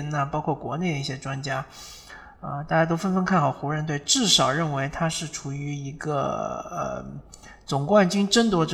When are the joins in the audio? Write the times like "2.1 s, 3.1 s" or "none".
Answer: none